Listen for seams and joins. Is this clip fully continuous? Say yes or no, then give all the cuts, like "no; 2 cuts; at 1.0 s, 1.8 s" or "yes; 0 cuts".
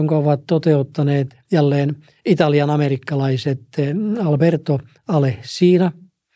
yes; 0 cuts